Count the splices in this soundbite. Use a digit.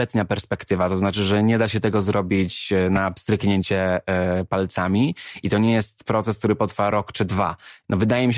0